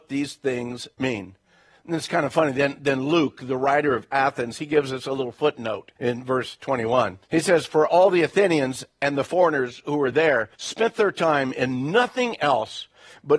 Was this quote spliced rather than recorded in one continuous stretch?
yes; 4 cuts; at 0.9 s, 6.0 s, 7.2 s, 10.5 s

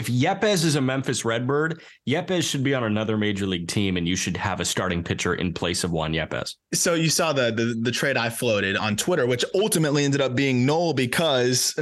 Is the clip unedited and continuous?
no; 1 cut; at 8.8 s

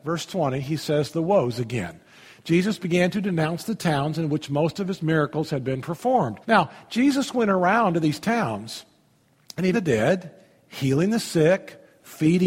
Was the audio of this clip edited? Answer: yes; 2 cuts; at 6.4 s, 9.7 s

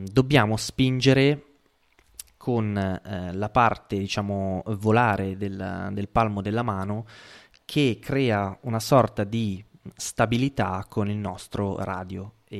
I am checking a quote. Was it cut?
no; 0 cuts

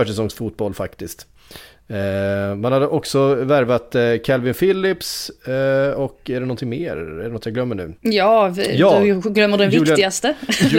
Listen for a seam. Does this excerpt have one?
yes; 1 cut; at 8.0 s

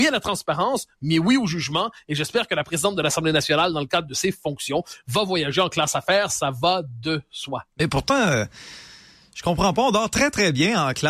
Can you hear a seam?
no; 0 cuts

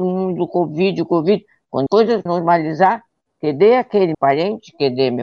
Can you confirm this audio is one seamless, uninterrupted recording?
no; 3 cuts; at 1.9 s, 2.3 s, 4.1 s

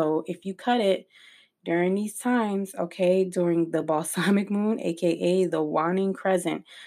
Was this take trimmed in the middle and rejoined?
no; 0 cuts

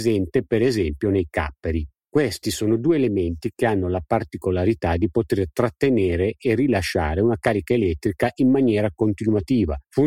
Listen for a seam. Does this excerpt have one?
no; 0 cuts

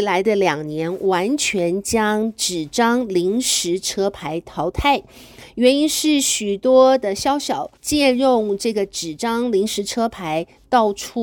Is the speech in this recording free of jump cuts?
no; 1 cut; at 7.8 s

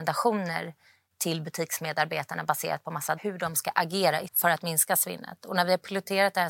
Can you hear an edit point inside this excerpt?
yes; 2 cuts; at 3.2 s, 4.3 s

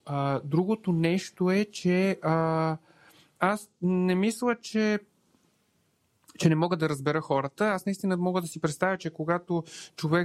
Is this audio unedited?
yes; 0 cuts

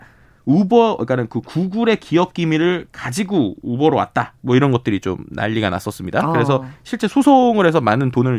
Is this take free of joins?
yes; 0 cuts

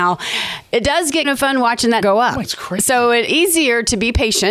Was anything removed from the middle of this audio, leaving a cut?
yes; 4 cuts; at 1.2 s, 2.0 s, 2.4 s, 3.3 s

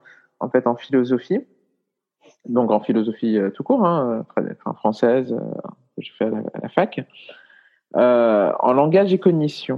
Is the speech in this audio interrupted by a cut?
no; 0 cuts

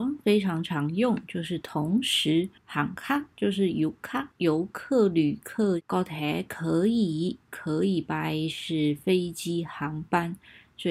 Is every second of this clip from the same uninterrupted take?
no; 2 cuts; at 2.6 s, 4.3 s

